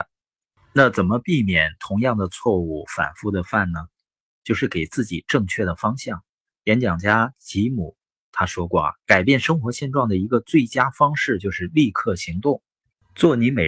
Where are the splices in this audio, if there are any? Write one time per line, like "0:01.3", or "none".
0:06.4
0:09.0